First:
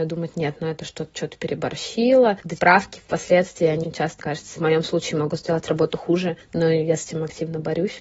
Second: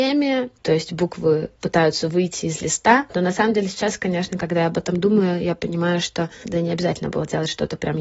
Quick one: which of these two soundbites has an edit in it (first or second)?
first